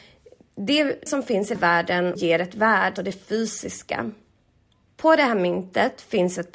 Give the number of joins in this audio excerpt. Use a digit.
4